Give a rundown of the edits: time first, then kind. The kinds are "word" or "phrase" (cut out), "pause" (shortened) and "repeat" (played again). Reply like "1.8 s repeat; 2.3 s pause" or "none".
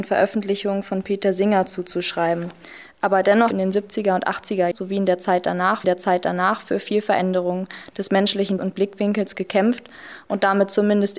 3.5 s phrase; 4.7 s word; 5.8 s repeat; 8.6 s word